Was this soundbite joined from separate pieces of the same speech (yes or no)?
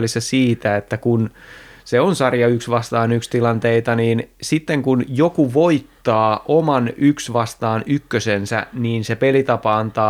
no